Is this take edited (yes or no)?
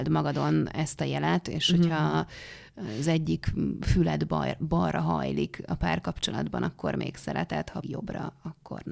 yes